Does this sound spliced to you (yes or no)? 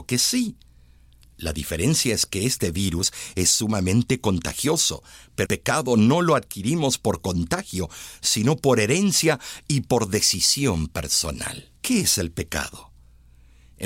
yes